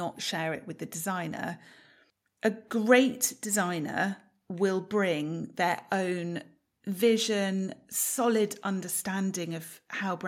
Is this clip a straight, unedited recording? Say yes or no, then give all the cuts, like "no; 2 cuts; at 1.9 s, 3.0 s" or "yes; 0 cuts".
yes; 0 cuts